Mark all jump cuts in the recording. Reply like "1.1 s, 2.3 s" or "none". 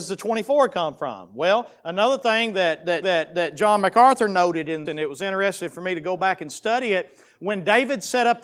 3.0 s, 4.9 s